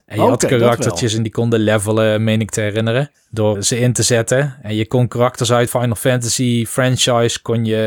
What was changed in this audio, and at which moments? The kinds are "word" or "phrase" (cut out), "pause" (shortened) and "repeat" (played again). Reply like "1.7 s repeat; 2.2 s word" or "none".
3.5 s word; 5.7 s phrase

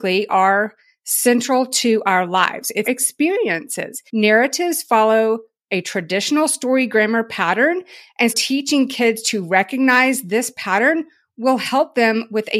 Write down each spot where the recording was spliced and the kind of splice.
2.8 s phrase; 4.1 s pause; 8.3 s word

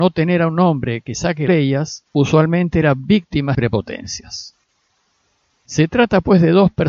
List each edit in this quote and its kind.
1.5 s phrase; 2.1 s pause; 3.5 s phrase

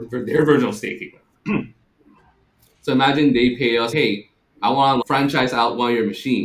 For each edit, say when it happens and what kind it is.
3.9 s word; 5.0 s word

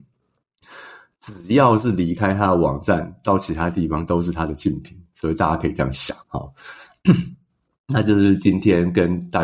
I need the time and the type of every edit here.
6.2 s pause

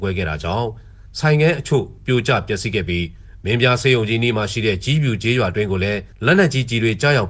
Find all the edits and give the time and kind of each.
6.1 s pause

